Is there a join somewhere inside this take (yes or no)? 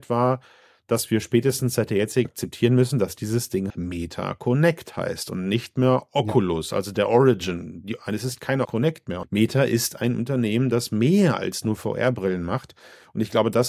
yes